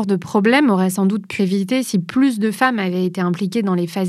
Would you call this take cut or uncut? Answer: cut